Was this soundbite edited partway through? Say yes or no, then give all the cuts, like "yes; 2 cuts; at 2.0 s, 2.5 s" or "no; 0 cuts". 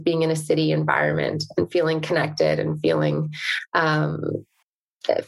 no; 0 cuts